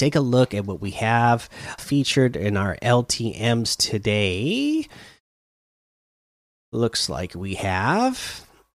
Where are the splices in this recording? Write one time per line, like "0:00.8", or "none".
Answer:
0:01.8